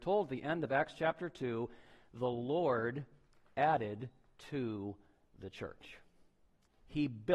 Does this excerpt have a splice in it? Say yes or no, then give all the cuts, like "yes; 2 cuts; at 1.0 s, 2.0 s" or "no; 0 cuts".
no; 0 cuts